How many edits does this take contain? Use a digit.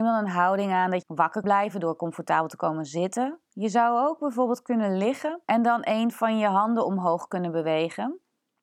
3